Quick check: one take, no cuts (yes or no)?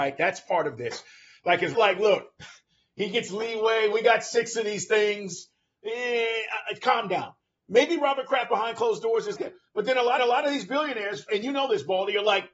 no